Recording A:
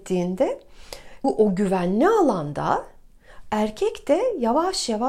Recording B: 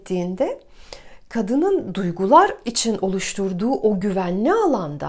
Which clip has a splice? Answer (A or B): A